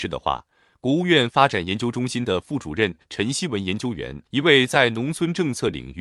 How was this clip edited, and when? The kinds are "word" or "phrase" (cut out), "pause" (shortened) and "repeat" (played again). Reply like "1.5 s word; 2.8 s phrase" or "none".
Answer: 4.3 s pause